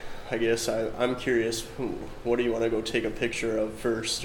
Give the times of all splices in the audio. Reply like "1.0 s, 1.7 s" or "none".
none